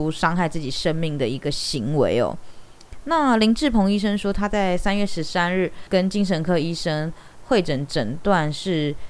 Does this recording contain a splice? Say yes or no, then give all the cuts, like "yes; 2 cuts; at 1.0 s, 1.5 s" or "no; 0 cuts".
no; 0 cuts